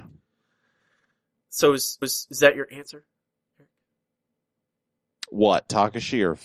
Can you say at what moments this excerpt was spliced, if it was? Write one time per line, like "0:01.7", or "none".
0:02.0